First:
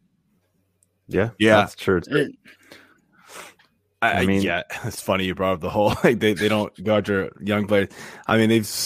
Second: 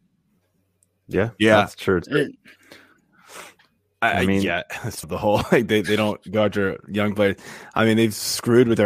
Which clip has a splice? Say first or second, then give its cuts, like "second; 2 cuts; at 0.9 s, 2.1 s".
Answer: second; 1 cut; at 5.0 s